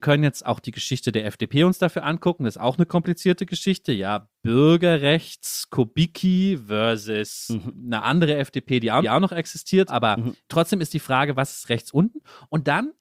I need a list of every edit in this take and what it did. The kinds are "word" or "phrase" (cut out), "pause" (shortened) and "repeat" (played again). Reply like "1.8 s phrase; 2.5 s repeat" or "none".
4.3 s pause; 9.0 s repeat; 9.9 s word